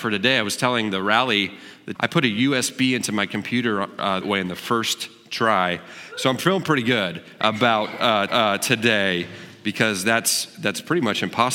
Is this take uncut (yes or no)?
no